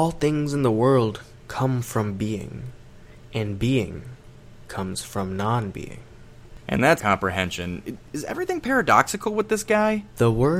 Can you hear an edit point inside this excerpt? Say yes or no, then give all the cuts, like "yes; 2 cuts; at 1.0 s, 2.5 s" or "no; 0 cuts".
yes; 2 cuts; at 6.6 s, 7.0 s